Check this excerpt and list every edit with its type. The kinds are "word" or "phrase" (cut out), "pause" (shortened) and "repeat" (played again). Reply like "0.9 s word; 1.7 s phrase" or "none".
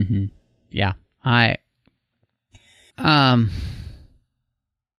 2.9 s phrase

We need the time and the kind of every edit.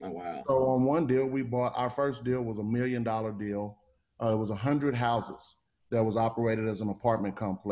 none

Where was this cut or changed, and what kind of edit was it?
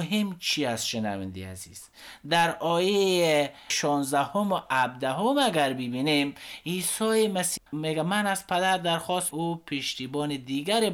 7.6 s word; 9.3 s phrase

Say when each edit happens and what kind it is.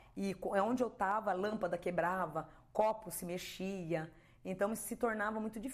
none

